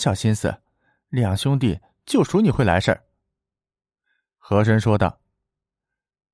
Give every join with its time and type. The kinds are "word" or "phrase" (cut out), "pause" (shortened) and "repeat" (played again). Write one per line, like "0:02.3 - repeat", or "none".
none